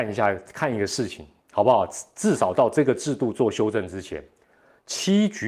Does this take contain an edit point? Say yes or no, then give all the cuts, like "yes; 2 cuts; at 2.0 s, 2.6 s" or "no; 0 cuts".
no; 0 cuts